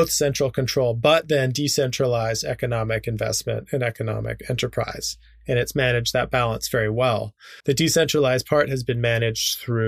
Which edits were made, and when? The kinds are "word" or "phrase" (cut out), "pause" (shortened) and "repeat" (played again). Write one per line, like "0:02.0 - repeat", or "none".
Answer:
0:07.6 - pause

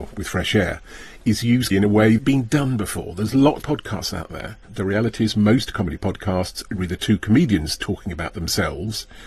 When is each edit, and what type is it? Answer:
0:01.7 - word
0:02.2 - phrase
0:03.6 - phrase
0:04.6 - pause

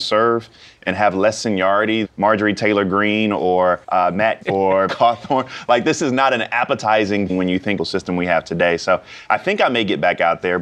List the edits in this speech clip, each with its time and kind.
0:02.0 - word
0:03.8 - pause
0:04.4 - word
0:04.9 - word
0:07.3 - word
0:07.8 - phrase

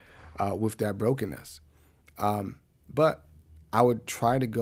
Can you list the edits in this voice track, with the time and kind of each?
none

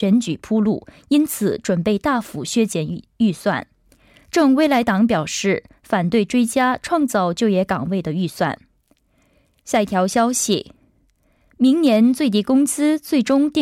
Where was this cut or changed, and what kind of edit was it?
none

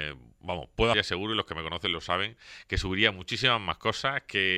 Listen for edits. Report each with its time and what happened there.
0:00.9 - word

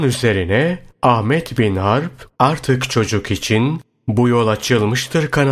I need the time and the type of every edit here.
0:02.4 - phrase

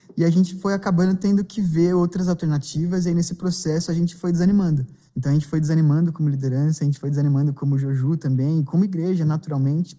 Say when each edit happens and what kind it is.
0:05.1 - pause

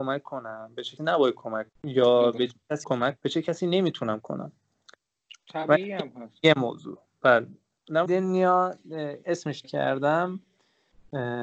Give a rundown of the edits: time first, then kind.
0:01.0 - word
0:01.7 - word
0:02.8 - word
0:03.2 - word
0:04.2 - word
0:08.1 - word
0:09.2 - word
0:09.6 - word

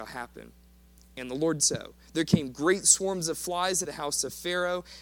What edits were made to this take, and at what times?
0:01.6 - word
0:03.8 - word

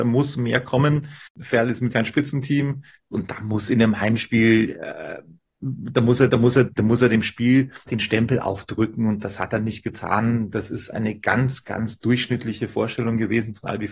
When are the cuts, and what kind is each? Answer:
0:01.3 - pause
0:01.9 - word
0:03.1 - word
0:05.4 - pause
0:06.3 - repeat
0:07.9 - word
0:10.9 - word
0:11.6 - word

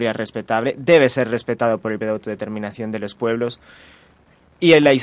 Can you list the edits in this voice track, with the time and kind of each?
0:02.0 - word

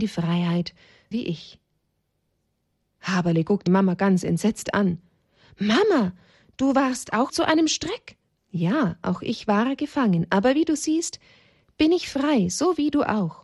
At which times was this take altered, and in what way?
0:01.1 - word
0:03.7 - word
0:07.3 - word
0:08.3 - pause

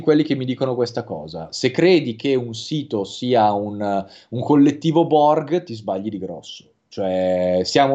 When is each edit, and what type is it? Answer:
none

